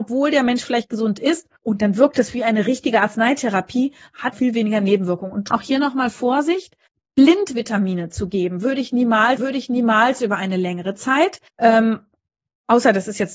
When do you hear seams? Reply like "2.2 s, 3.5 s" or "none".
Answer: 1.6 s, 4.3 s, 5.5 s, 6.9 s, 9.4 s, 11.5 s